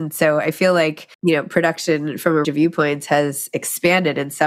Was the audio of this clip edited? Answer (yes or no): yes